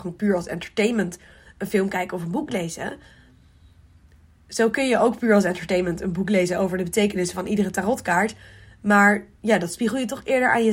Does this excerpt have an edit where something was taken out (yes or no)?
no